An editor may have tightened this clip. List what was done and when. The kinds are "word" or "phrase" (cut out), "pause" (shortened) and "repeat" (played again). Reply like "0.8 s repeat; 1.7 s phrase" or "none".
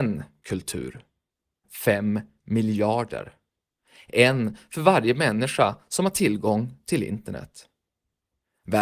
1.6 s word